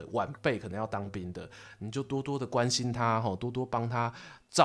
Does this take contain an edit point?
no; 0 cuts

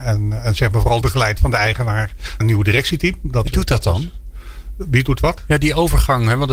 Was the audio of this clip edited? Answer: yes; 3 cuts; at 1.0 s, 2.4 s, 3.5 s

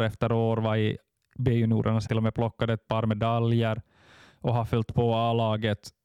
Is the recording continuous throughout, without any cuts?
no; 1 cut; at 2.1 s

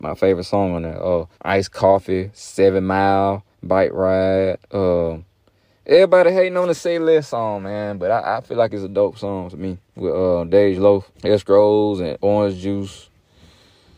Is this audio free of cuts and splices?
no; 5 cuts; at 1.3 s, 3.5 s, 4.6 s, 9.9 s, 11.1 s

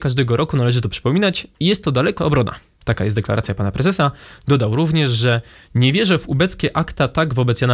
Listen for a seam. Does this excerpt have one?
yes; 1 cut; at 2.2 s

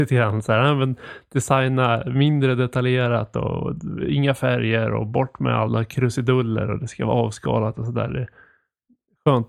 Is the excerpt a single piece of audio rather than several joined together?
yes; 0 cuts

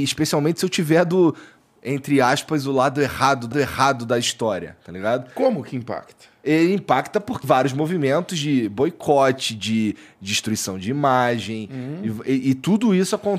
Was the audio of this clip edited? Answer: yes; 2 cuts; at 3.5 s, 7.4 s

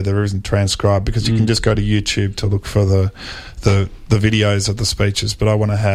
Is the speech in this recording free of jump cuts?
yes; 0 cuts

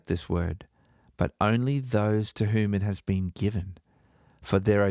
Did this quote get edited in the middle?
no; 0 cuts

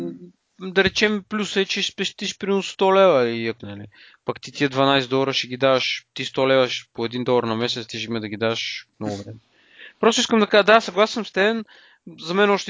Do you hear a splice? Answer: yes; 3 cuts; at 3.6 s, 6.9 s, 8.9 s

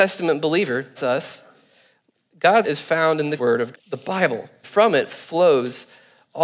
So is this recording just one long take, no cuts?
no; 5 cuts; at 1.0 s, 2.6 s, 3.4 s, 3.7 s, 4.6 s

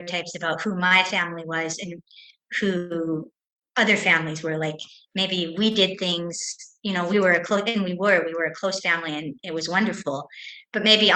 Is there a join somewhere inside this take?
no; 0 cuts

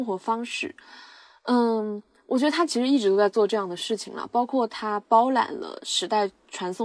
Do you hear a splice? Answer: no; 0 cuts

